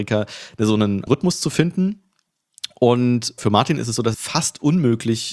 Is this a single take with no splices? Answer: no; 3 cuts; at 1.1 s, 3.4 s, 4.1 s

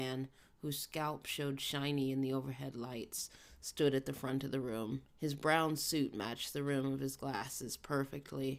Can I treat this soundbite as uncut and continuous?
no; 1 cut; at 5.1 s

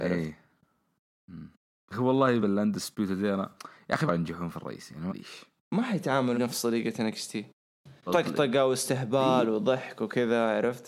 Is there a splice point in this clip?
yes; 7 cuts; at 1.9 s, 2.4 s, 4.1 s, 4.5 s, 5.1 s, 6.3 s, 8.1 s

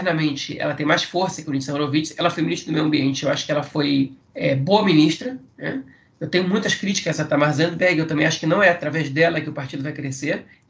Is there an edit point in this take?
no; 0 cuts

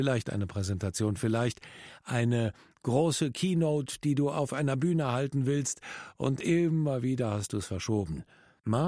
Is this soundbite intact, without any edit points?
yes; 0 cuts

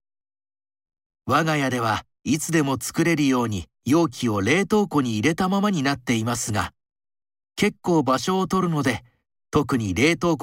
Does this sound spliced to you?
yes; 1 cut; at 3.7 s

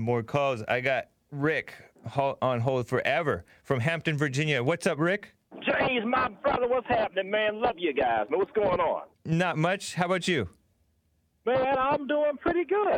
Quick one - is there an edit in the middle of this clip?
yes; 2 cuts; at 5.4 s, 9.1 s

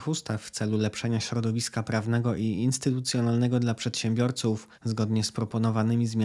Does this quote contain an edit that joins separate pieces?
yes; 1 cut; at 4.7 s

